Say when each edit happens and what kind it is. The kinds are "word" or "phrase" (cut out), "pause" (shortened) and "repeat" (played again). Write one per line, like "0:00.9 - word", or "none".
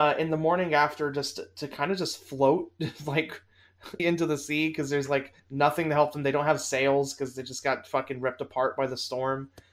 0:04.0 - word
0:05.4 - pause